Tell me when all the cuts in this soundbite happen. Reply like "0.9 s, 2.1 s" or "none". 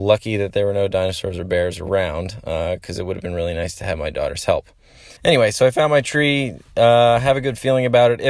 5.2 s